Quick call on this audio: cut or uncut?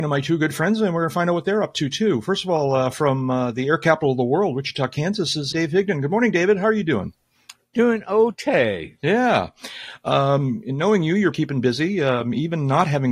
cut